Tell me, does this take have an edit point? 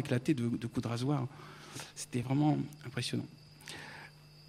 no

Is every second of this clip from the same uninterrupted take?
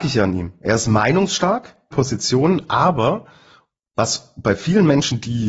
no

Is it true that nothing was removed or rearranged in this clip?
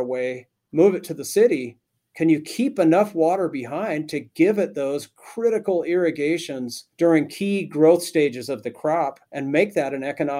no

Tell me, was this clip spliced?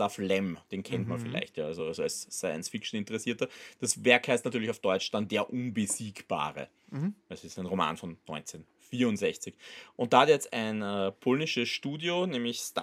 no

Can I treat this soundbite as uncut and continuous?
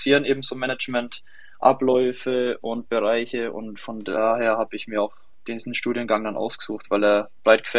yes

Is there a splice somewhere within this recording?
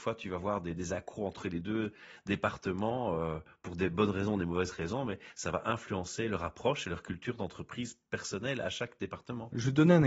no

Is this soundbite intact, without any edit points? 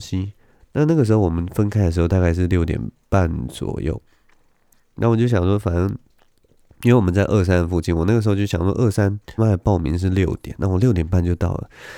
no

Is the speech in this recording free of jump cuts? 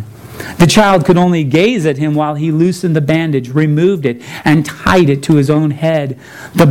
yes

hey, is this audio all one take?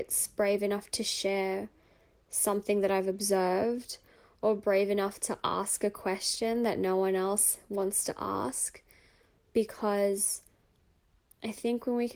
yes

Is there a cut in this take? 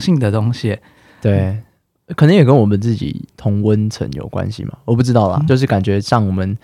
yes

